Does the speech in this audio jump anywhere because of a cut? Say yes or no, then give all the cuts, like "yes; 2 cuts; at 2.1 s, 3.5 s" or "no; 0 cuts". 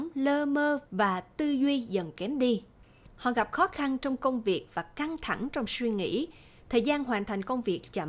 no; 0 cuts